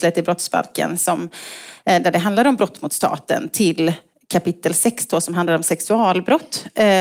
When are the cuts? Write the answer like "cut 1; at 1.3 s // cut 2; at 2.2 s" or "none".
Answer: none

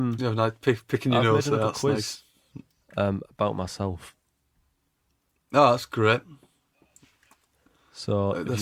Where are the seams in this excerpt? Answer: none

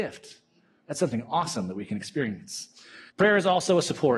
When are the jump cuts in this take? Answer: cut 1; at 3.1 s

